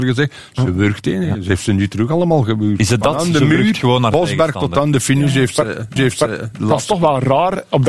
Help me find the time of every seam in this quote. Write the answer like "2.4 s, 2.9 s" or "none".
6.0 s